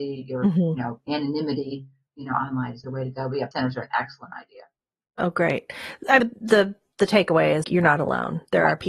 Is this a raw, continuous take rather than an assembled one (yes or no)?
no